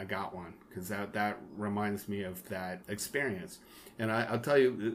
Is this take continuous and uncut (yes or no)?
no